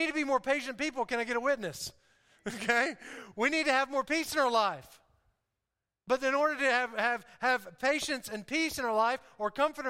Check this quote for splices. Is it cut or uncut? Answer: uncut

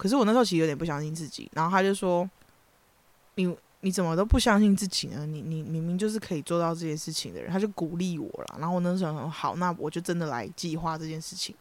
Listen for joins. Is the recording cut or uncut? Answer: cut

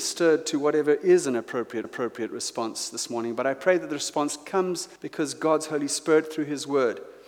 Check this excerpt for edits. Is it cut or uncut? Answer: cut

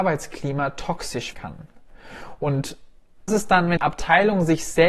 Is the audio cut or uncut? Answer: cut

